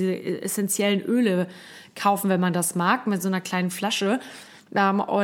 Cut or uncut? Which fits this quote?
uncut